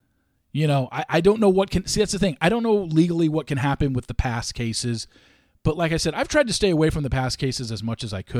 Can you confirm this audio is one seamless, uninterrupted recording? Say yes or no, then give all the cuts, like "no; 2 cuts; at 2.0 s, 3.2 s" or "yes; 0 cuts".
yes; 0 cuts